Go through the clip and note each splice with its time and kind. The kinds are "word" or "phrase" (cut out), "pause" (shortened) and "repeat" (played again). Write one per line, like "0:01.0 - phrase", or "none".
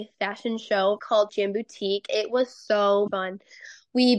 0:01.0 - phrase
0:01.3 - word
0:02.1 - word
0:03.1 - word